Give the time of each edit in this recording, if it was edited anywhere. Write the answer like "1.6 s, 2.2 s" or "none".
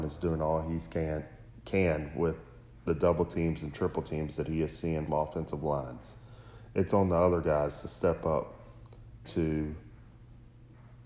5.1 s, 9.2 s